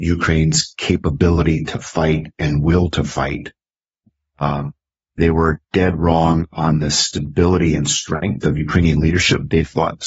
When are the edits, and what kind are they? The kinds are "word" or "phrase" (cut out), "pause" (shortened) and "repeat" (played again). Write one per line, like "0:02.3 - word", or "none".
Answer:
0:05.6 - pause